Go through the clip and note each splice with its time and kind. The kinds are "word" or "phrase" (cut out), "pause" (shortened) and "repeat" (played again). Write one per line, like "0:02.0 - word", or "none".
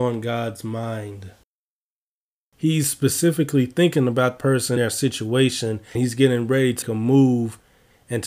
0:04.4 - word
0:04.8 - word
0:05.9 - word
0:06.8 - word